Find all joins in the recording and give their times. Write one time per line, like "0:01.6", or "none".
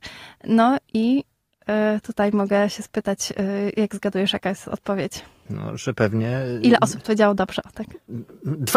none